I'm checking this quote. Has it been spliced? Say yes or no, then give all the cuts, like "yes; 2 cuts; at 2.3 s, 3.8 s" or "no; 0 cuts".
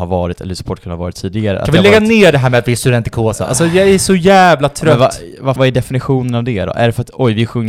yes; 1 cut; at 5.6 s